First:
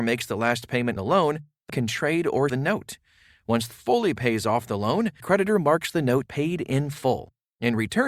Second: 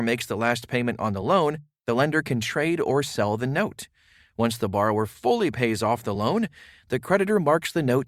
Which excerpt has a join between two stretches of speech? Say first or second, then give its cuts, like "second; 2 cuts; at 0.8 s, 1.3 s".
first; 6 cuts; at 1.0 s, 1.7 s, 2.5 s, 3.7 s, 5.2 s, 6.3 s